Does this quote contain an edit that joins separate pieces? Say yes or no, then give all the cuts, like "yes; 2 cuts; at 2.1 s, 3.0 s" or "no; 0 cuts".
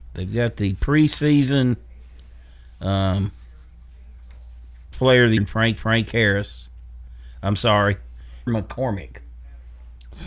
yes; 4 cuts; at 4.9 s, 5.4 s, 5.8 s, 8.5 s